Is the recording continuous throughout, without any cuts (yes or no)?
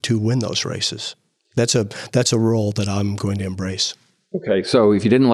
yes